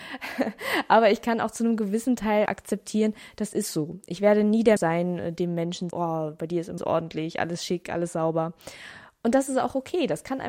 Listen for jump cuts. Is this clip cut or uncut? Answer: cut